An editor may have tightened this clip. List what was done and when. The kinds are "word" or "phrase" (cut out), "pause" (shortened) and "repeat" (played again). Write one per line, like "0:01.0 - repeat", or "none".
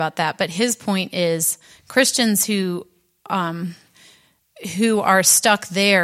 none